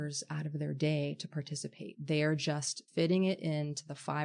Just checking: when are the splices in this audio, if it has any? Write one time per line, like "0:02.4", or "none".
0:02.9